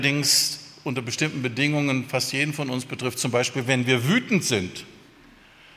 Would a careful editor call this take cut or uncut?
uncut